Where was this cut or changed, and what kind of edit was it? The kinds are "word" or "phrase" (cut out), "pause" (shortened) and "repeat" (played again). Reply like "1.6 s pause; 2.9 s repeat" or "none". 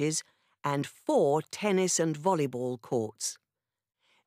none